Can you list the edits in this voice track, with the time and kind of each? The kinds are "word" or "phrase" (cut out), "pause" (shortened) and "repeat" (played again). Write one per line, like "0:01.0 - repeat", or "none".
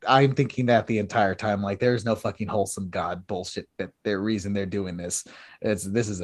none